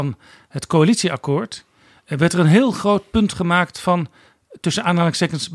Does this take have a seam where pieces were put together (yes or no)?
no